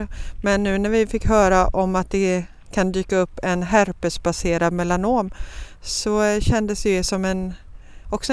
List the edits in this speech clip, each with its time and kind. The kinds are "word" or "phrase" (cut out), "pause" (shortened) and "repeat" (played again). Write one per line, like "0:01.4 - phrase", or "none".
none